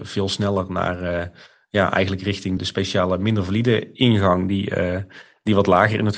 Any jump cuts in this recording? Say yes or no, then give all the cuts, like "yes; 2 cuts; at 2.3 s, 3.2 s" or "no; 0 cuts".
yes; 1 cut; at 2.6 s